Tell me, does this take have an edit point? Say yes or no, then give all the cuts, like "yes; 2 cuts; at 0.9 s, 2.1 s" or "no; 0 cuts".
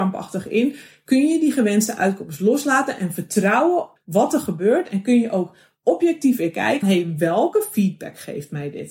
yes; 2 cuts; at 4.0 s, 6.8 s